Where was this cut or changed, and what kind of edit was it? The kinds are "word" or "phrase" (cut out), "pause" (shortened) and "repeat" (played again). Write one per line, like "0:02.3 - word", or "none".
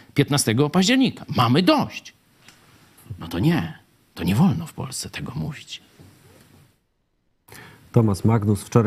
none